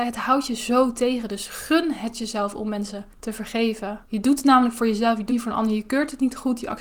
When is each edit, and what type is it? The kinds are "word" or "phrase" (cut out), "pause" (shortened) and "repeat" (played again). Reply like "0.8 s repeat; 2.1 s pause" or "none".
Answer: 3.1 s pause; 4.0 s pause; 5.3 s word